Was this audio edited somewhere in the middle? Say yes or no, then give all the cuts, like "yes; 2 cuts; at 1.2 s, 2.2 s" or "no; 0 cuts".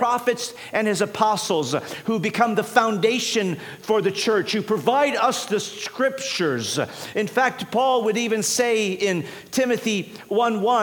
no; 0 cuts